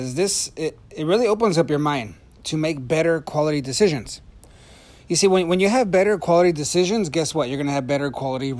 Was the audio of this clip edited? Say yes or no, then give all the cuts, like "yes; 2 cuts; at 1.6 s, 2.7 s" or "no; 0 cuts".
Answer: no; 0 cuts